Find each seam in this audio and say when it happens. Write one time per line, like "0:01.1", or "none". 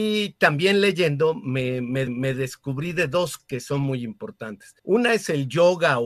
0:02.1
0:03.4
0:04.8